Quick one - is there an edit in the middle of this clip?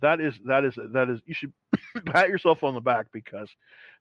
no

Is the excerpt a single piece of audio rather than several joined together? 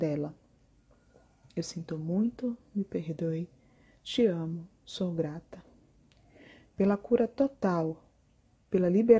yes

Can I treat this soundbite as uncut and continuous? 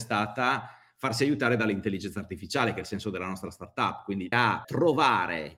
no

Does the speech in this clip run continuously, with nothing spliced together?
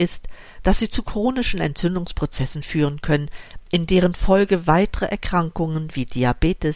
yes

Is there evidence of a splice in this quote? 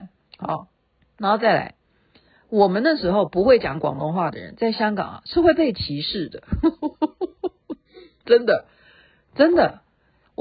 yes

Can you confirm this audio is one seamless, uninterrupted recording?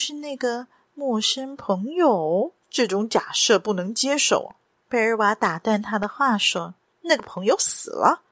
no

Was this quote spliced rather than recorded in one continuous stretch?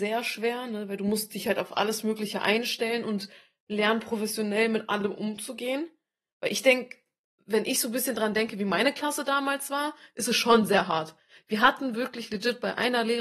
no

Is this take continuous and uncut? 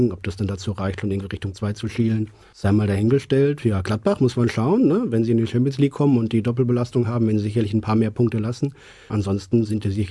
no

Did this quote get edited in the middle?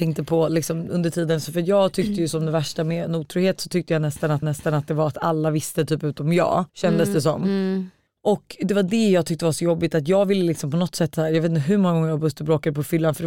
yes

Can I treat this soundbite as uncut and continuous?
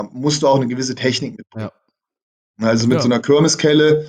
yes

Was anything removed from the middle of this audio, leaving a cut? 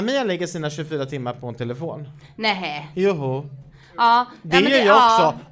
no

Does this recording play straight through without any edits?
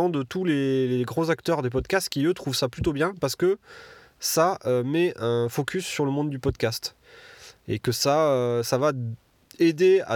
yes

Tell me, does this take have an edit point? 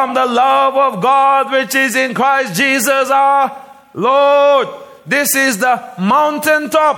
no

